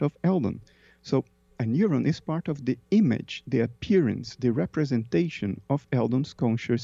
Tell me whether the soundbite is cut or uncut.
uncut